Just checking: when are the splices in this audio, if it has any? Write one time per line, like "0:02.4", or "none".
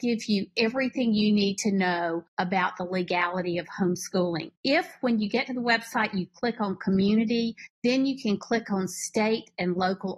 0:02.3
0:04.6

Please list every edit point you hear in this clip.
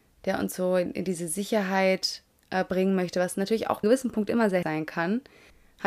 0:02.3
0:03.8
0:04.6

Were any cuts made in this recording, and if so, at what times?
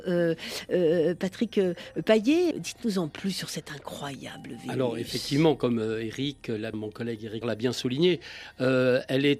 0:02.5
0:06.7
0:07.4

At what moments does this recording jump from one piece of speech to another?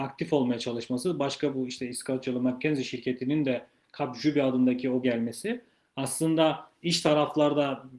0:05.0

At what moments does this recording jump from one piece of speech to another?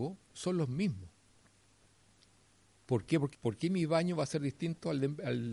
0:03.3

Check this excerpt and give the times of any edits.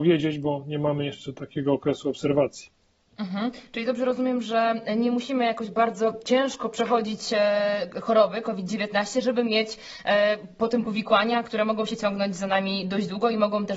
none

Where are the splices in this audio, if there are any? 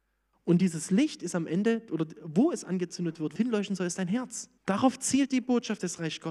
0:03.4
0:04.6

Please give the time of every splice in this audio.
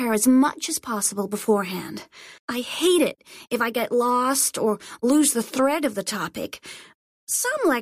0:02.4

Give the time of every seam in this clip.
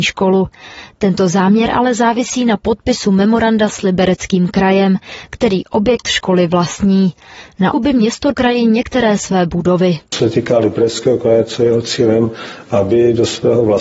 0:07.7
0:08.3

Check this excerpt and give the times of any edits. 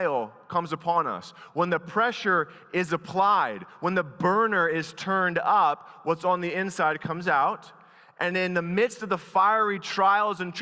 none

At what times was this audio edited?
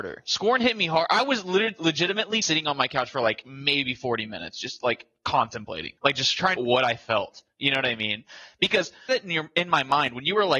0:02.4
0:06.0
0:06.6
0:09.1

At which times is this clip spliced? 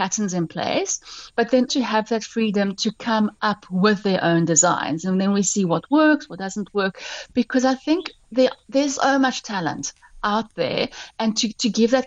0:01.7
0:09.0

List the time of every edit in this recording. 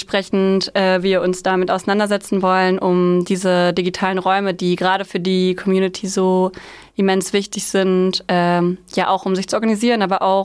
none

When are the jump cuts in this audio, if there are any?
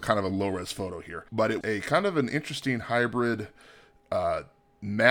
0:01.3
0:01.6

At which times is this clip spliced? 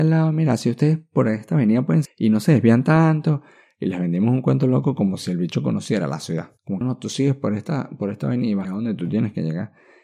0:02.0
0:06.8
0:08.6

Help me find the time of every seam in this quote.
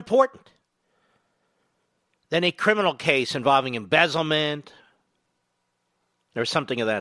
none

